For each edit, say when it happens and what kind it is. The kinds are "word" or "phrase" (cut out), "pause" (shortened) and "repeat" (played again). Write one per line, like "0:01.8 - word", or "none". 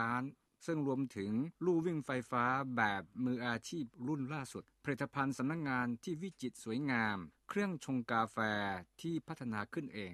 0:01.5 - pause